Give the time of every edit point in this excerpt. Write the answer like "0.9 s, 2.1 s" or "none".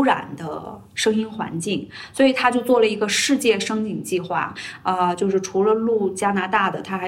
none